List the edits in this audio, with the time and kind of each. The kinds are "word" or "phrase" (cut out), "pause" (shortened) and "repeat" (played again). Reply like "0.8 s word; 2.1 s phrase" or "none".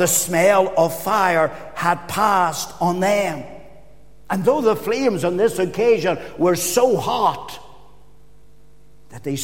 none